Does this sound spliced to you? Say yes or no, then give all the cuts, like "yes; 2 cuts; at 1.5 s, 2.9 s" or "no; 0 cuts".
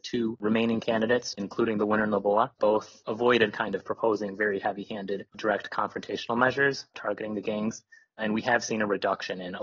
no; 0 cuts